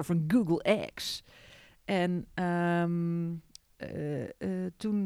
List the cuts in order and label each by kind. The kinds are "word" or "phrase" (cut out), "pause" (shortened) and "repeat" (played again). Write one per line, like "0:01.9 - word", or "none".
none